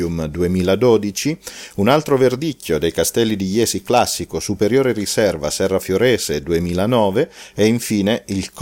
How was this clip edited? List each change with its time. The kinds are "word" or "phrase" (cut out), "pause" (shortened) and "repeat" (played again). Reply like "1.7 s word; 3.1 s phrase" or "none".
none